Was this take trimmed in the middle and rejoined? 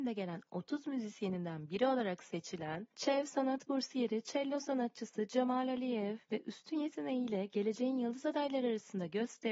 yes; 1 cut; at 2.9 s

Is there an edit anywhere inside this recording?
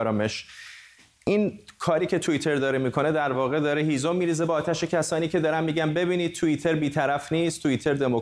no; 0 cuts

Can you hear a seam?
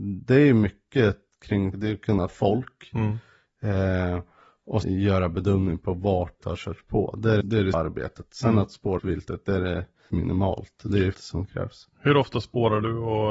yes; 9 cuts; at 1.7 s, 2.3 s, 4.8 s, 6.4 s, 7.4 s, 7.7 s, 9.0 s, 10.1 s, 11.1 s

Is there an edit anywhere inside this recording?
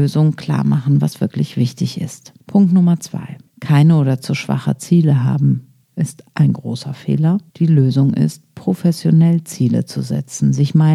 yes; 4 cuts; at 2.4 s, 3.5 s, 5.8 s, 7.5 s

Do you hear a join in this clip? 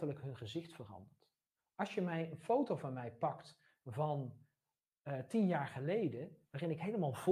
no; 0 cuts

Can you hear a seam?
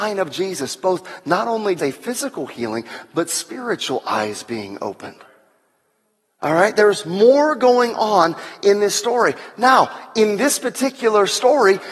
yes; 1 cut; at 1.8 s

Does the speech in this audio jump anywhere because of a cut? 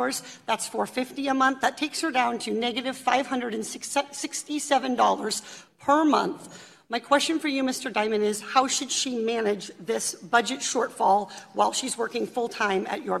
no; 0 cuts

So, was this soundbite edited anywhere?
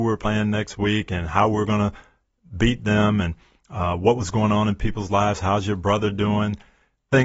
no; 0 cuts

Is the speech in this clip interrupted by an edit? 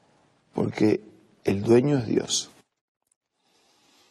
no; 0 cuts

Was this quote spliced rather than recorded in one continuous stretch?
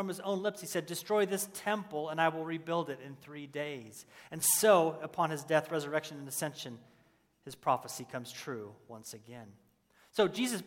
no; 0 cuts

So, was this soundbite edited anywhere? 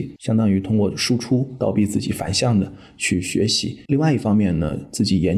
yes; 1 cut; at 3.8 s

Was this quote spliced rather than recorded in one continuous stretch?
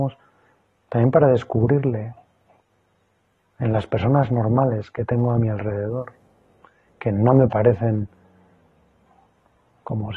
no; 0 cuts

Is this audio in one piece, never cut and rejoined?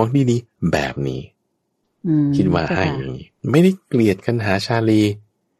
no; 1 cut; at 3.4 s

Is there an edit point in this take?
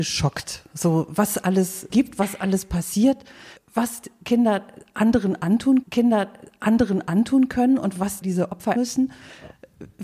yes; 5 cuts; at 1.9 s, 3.6 s, 5.8 s, 8.2 s, 8.8 s

